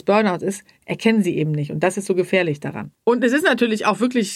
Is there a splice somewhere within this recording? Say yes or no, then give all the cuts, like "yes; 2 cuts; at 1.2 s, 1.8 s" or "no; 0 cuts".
yes; 1 cut; at 3.0 s